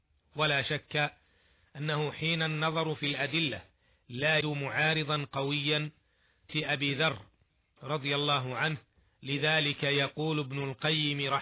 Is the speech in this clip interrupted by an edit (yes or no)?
yes